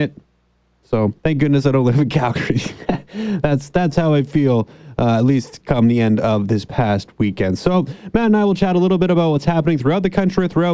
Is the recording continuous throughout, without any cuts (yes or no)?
no